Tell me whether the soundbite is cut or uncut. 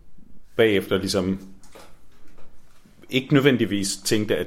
uncut